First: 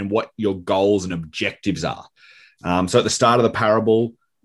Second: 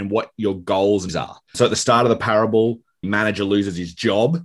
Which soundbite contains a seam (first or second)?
second